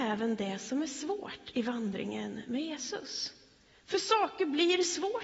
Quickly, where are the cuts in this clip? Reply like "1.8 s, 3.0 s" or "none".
none